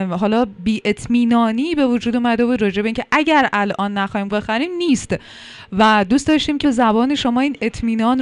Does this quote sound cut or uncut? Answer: cut